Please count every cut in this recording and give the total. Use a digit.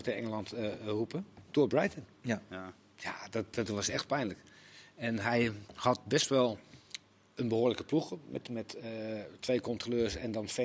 1